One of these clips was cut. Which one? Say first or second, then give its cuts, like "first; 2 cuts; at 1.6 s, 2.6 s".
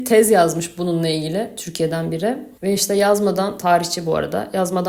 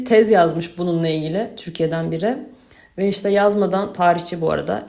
first; 1 cut; at 2.6 s